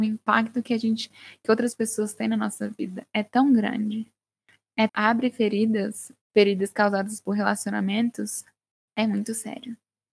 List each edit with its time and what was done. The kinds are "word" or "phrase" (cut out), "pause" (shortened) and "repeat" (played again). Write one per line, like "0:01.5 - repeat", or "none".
0:04.9 - phrase